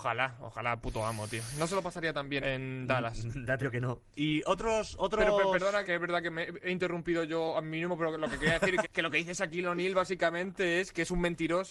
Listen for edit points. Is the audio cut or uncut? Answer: cut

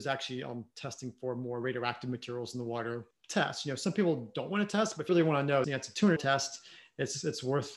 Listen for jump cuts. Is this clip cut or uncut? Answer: cut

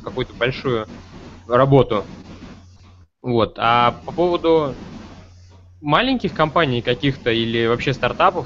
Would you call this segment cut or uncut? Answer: uncut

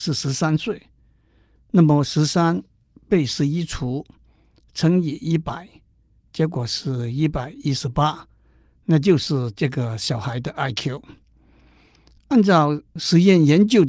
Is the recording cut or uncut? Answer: uncut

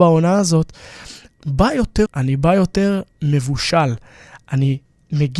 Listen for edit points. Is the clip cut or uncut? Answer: cut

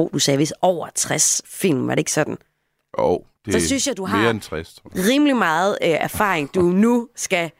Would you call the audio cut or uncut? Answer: uncut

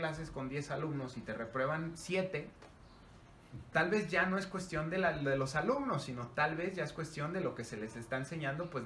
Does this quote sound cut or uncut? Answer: cut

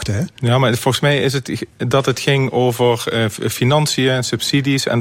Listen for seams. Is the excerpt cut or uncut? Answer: uncut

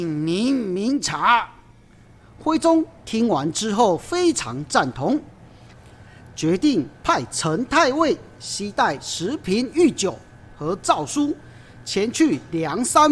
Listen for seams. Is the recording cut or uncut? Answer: uncut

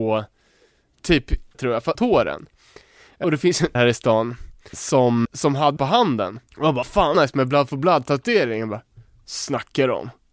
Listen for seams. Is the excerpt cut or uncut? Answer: cut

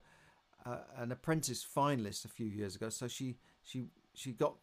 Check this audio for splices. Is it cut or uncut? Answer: uncut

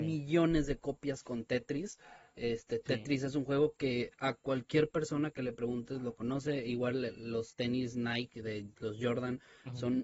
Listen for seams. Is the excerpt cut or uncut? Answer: uncut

